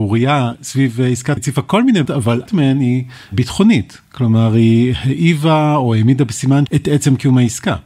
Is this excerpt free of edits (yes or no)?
no